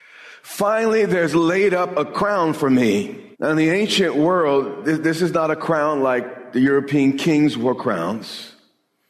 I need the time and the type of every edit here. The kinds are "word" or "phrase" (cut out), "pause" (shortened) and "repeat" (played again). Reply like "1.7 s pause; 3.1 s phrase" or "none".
3.3 s pause